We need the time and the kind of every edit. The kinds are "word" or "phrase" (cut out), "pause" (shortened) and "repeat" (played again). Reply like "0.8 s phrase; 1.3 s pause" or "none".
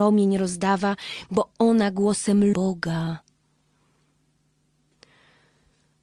2.5 s phrase